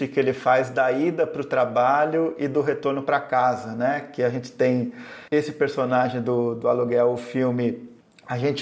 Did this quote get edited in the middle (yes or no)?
yes